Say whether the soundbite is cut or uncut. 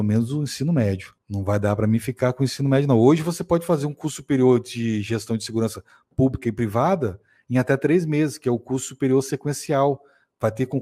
uncut